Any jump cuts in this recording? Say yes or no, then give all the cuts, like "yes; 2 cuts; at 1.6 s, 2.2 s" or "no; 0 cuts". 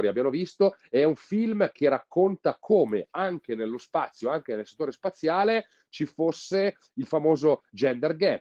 no; 0 cuts